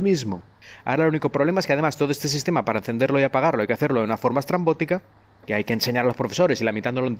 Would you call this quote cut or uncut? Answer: uncut